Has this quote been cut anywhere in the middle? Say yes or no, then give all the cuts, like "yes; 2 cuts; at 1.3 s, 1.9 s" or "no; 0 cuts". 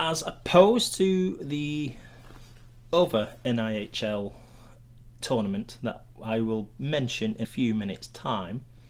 yes; 1 cut; at 7.4 s